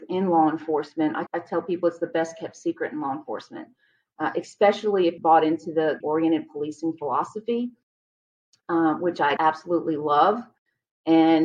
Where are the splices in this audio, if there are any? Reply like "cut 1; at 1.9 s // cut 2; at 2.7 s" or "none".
cut 1; at 1.3 s // cut 2; at 5.2 s // cut 3; at 6.0 s // cut 4; at 9.4 s

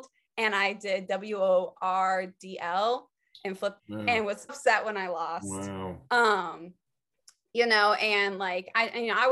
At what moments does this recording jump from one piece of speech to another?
cut 1; at 3.8 s // cut 2; at 4.5 s // cut 3; at 6.1 s

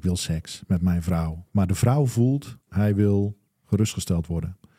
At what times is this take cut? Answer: cut 1; at 1.5 s // cut 2; at 2.6 s

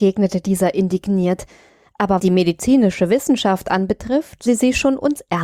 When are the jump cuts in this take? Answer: cut 1; at 2.2 s // cut 2; at 4.5 s

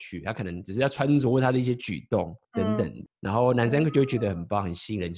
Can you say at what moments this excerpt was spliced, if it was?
cut 1; at 2.4 s // cut 2; at 3.1 s

